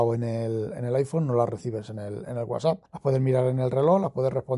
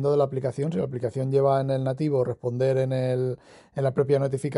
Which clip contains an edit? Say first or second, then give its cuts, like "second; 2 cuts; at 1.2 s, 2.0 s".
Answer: first; 1 cut; at 2.9 s